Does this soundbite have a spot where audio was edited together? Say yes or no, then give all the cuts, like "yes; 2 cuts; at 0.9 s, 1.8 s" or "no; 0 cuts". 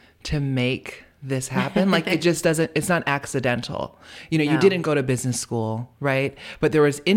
no; 0 cuts